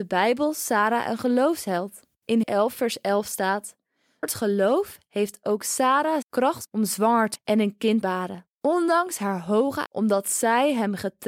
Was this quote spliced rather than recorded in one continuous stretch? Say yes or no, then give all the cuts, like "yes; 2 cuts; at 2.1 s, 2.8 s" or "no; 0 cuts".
yes; 7 cuts; at 2.4 s, 4.2 s, 6.2 s, 6.6 s, 7.4 s, 8.0 s, 9.9 s